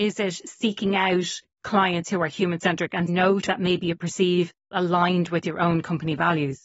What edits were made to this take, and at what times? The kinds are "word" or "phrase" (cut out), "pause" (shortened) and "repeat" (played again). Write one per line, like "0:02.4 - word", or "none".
0:01.5 - pause
0:03.1 - word
0:03.5 - word
0:04.7 - phrase